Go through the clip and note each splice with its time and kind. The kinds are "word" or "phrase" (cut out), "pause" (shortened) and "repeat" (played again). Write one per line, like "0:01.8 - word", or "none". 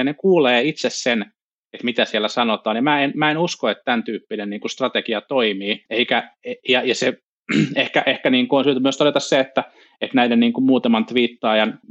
none